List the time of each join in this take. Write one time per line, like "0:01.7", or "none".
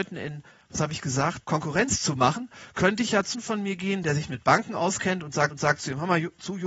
0:01.4
0:03.3
0:05.5